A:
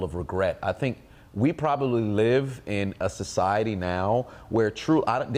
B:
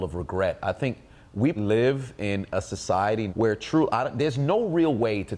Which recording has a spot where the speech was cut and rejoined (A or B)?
B